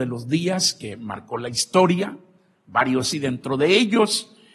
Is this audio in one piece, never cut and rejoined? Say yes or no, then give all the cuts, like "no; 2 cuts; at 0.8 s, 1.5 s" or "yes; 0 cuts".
no; 1 cut; at 3.1 s